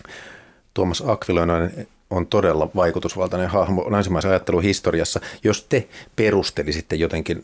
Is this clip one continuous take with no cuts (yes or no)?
yes